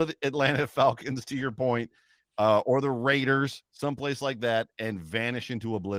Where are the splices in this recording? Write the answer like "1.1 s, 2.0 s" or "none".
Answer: none